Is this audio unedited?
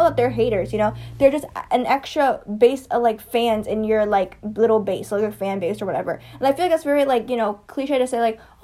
yes; 0 cuts

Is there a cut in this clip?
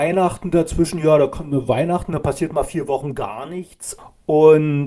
no; 0 cuts

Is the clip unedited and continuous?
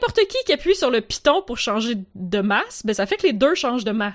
yes; 0 cuts

